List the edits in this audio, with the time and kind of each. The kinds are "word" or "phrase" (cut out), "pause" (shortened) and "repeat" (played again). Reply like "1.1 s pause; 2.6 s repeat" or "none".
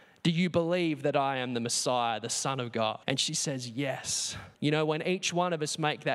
3.0 s pause; 4.5 s pause